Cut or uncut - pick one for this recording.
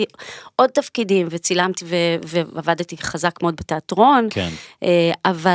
cut